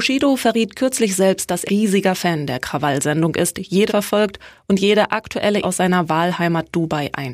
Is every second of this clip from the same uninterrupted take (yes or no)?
no